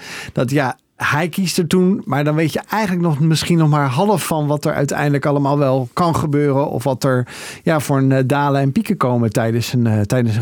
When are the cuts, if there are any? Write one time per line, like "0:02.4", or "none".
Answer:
none